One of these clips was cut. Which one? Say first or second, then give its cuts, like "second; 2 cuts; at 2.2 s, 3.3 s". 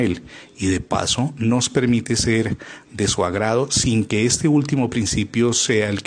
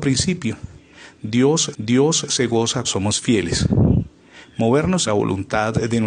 second; 3 cuts; at 1.7 s, 2.8 s, 5.1 s